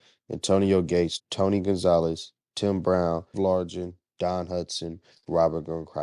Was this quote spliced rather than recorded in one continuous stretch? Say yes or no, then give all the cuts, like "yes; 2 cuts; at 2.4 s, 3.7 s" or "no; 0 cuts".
yes; 2 cuts; at 1.2 s, 3.3 s